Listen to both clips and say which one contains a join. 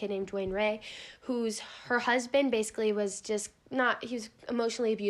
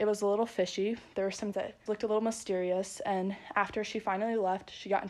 second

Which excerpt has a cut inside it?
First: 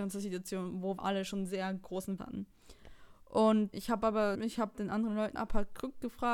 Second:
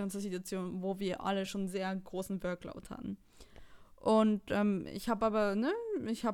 first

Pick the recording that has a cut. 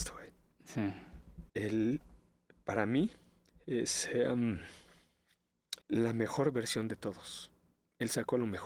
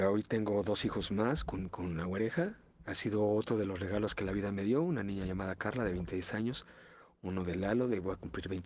first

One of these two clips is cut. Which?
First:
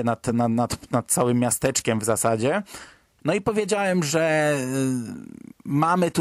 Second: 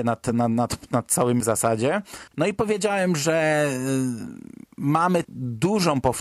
second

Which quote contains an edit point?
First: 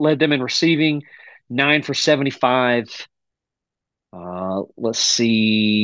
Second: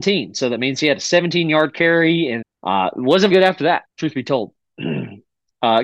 second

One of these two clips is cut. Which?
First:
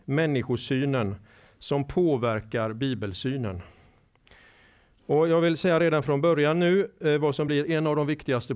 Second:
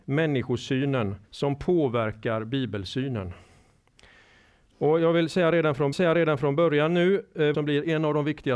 second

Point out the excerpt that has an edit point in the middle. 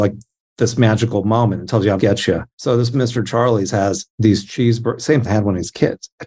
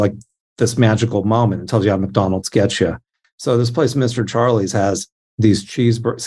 first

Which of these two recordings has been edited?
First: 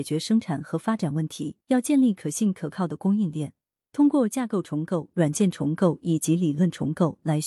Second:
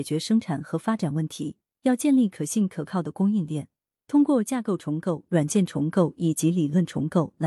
first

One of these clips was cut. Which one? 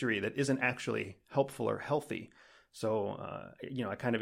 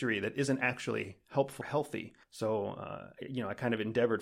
second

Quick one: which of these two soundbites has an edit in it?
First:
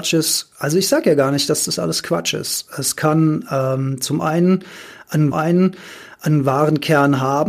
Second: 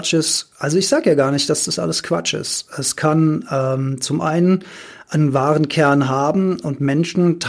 first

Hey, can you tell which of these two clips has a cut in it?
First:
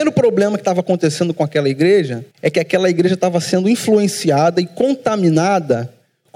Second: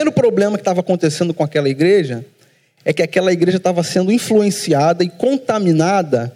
first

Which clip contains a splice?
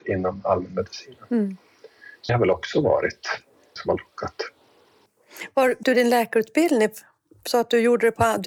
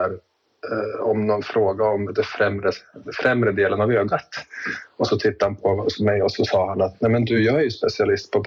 first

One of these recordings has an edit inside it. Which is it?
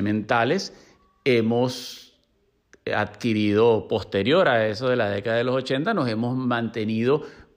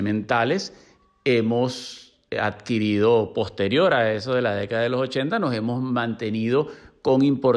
second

